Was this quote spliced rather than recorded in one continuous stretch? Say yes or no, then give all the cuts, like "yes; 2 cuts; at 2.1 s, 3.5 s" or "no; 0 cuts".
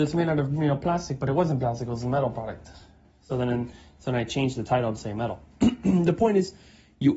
no; 0 cuts